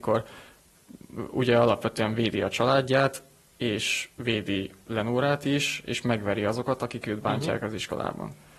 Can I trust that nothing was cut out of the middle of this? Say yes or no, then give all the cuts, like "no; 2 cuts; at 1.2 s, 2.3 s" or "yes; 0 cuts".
yes; 0 cuts